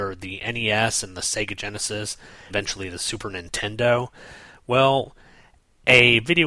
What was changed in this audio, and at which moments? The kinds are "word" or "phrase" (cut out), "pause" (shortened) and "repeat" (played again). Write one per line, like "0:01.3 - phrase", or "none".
0:02.5 - word